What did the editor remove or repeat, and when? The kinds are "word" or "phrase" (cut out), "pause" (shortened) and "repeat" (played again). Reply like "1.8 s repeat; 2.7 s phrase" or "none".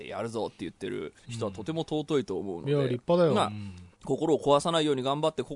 1.2 s pause